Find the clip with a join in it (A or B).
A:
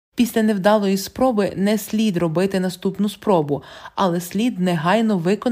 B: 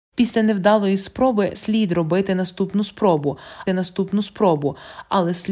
B